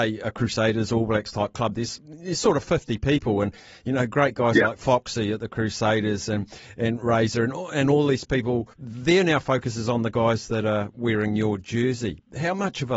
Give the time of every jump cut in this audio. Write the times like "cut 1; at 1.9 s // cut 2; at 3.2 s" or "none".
cut 1; at 8.7 s